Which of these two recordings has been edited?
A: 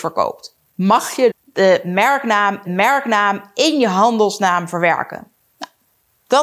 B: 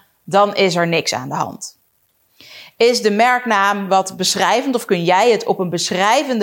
A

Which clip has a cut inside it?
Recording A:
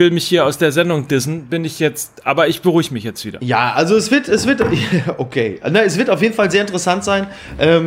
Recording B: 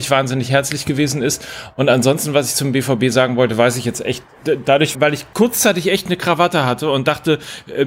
B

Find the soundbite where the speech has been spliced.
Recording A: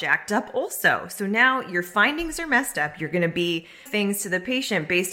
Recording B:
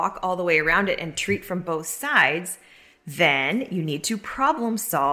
A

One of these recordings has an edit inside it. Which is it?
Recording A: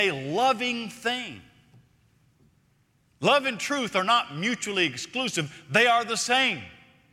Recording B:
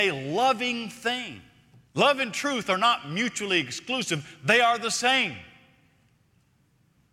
B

